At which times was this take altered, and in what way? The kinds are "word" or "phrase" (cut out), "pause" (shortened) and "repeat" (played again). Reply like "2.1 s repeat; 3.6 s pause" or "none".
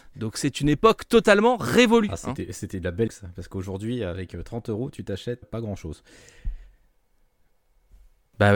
3.1 s word; 5.4 s word